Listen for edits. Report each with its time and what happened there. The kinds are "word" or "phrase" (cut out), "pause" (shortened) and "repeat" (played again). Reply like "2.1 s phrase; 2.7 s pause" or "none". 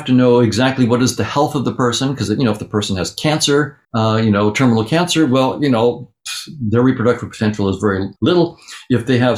3.8 s pause; 8.2 s pause